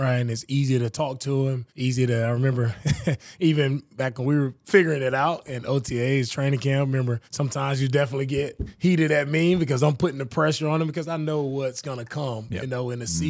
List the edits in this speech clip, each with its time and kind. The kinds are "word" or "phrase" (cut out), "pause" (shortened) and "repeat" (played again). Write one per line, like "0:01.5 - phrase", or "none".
0:01.7 - pause
0:07.3 - pause